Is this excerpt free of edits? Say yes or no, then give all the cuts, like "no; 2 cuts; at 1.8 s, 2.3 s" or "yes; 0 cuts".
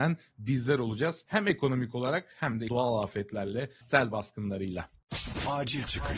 no; 2 cuts; at 2.7 s, 3.8 s